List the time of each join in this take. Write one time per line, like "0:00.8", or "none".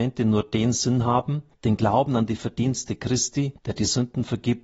0:01.5
0:03.6